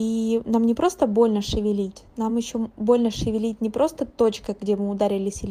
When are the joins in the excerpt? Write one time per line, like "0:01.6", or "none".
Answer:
none